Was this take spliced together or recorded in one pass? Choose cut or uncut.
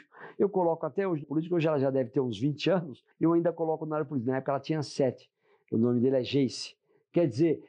cut